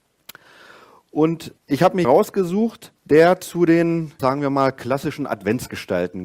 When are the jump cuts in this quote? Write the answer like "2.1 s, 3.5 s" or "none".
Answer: 1.6 s, 2.0 s, 3.0 s, 4.2 s